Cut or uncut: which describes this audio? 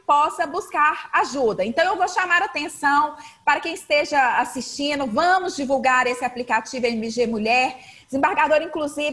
uncut